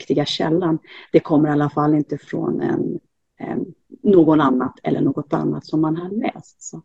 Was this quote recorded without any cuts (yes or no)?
yes